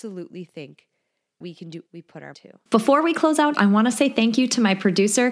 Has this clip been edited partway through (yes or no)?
yes